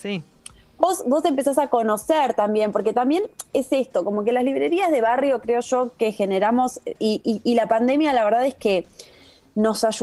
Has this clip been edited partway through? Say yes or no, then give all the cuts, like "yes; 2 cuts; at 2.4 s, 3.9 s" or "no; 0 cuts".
no; 0 cuts